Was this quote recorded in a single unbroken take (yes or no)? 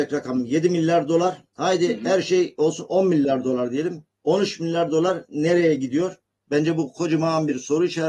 yes